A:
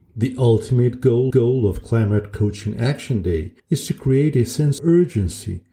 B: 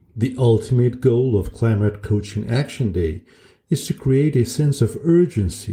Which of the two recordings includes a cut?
A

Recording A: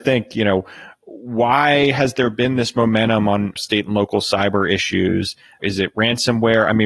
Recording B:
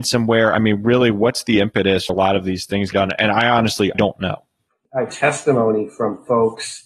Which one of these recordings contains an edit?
B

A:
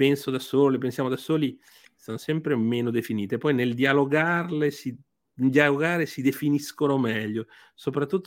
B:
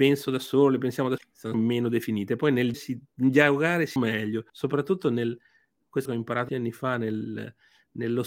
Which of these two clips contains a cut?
B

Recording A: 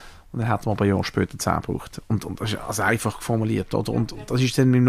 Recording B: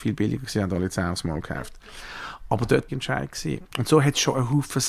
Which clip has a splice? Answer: B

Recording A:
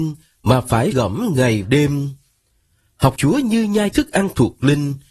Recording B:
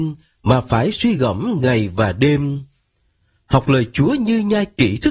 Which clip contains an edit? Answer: A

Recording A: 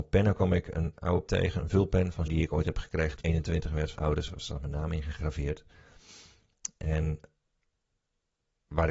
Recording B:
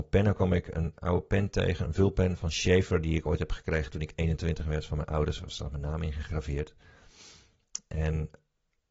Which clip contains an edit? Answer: A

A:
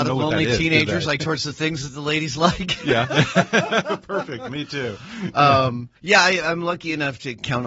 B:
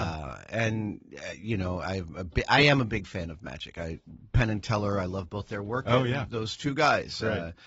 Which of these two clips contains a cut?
A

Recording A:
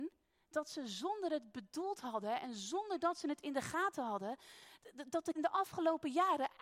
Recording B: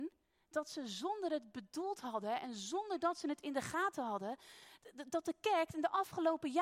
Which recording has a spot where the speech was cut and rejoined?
A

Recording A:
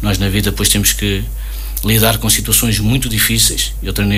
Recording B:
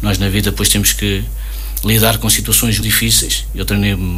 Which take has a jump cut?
B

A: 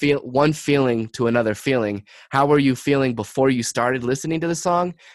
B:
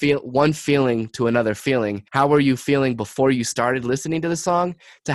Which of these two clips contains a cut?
B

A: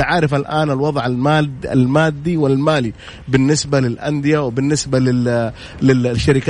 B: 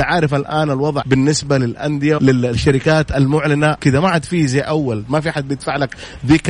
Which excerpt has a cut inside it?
B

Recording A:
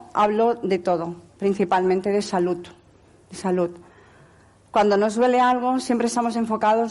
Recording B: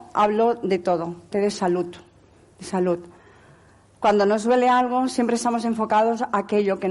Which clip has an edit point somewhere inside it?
B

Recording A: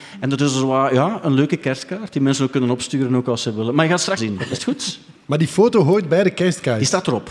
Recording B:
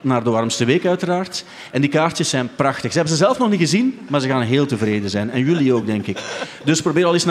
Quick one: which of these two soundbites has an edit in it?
A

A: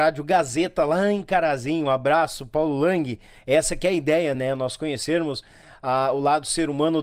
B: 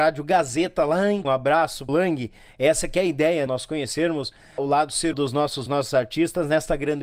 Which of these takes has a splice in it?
B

